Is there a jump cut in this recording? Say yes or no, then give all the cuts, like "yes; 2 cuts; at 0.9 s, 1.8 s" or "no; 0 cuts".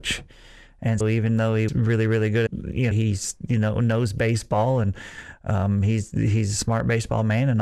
yes; 4 cuts; at 1.0 s, 1.7 s, 2.5 s, 2.9 s